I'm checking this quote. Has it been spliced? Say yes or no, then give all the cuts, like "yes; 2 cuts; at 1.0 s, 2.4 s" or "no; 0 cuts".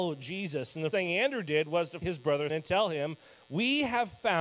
yes; 3 cuts; at 0.9 s, 2.0 s, 2.5 s